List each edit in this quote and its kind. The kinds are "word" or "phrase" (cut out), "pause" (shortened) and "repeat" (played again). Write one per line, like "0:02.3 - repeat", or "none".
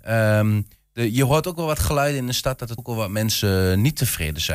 0:02.8 - word